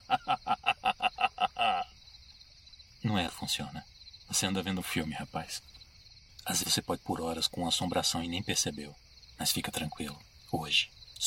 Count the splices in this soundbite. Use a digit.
4